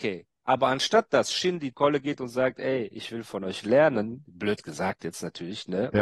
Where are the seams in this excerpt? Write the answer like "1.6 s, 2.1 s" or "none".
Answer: 1.7 s